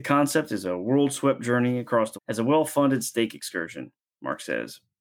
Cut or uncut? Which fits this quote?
cut